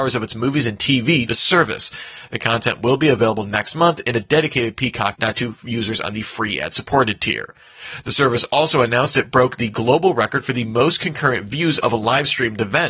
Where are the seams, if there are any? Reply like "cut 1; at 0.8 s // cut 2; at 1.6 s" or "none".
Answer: cut 1; at 1.3 s // cut 2; at 5.1 s